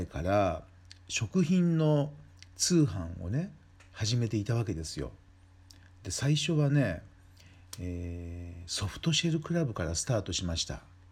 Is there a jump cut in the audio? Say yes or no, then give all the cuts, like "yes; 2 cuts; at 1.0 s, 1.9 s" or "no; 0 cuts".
no; 0 cuts